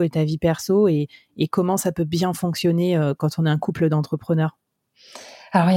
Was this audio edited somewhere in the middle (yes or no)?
no